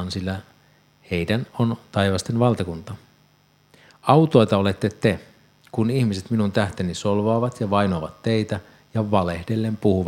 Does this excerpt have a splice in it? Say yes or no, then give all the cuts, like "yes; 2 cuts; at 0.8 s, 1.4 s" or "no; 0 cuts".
no; 0 cuts